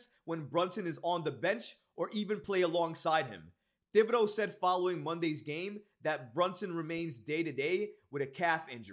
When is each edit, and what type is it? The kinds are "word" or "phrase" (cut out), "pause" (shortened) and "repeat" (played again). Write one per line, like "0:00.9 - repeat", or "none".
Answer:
none